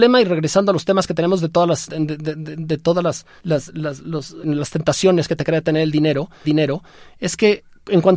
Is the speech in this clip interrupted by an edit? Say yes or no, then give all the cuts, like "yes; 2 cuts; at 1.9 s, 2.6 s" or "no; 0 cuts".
yes; 4 cuts; at 1.9 s, 3.4 s, 4.4 s, 6.4 s